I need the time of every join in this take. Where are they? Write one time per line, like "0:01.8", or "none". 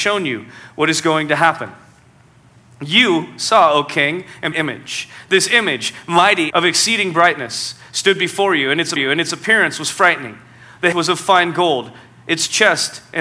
0:04.5
0:06.5
0:09.0
0:10.9